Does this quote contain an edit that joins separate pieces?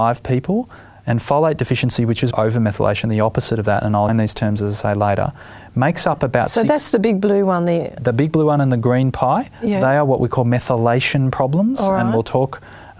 yes; 2 cuts; at 2.3 s, 4.1 s

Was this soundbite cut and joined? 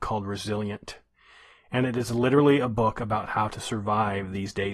no; 0 cuts

